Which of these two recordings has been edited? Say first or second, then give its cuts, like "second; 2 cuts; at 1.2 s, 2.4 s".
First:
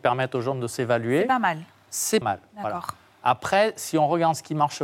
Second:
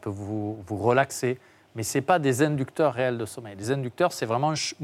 first; 1 cut; at 2.2 s